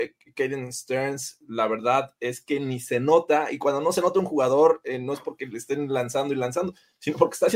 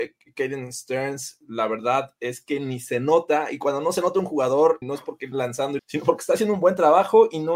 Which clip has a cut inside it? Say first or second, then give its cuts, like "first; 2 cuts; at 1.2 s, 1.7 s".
second; 3 cuts; at 4.8 s, 5.3 s, 5.8 s